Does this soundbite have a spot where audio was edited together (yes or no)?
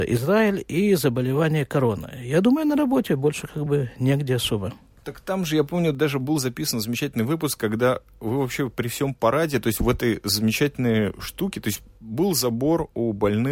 no